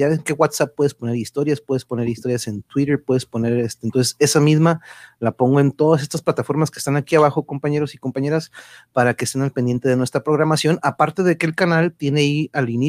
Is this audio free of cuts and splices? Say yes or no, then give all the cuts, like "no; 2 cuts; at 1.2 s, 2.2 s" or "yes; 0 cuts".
yes; 0 cuts